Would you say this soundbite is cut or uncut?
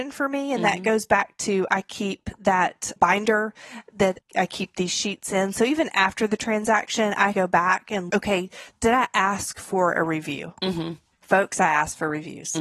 cut